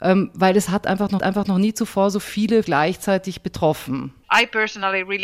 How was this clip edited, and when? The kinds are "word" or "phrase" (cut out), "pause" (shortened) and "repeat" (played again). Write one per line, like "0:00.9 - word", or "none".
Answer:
0:01.2 - repeat
0:02.6 - word
0:04.2 - pause